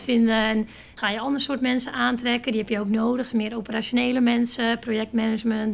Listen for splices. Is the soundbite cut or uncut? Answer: cut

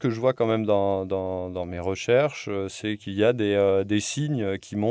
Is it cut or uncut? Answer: uncut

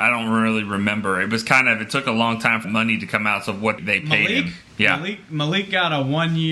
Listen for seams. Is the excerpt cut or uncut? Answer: cut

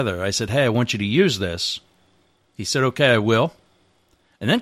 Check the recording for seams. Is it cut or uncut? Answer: uncut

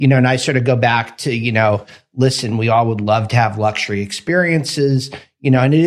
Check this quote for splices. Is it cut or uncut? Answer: uncut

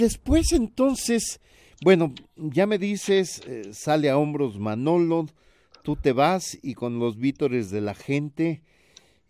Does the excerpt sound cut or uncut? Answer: uncut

